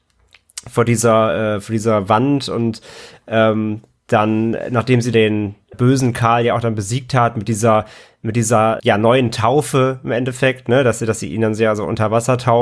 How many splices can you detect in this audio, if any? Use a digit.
3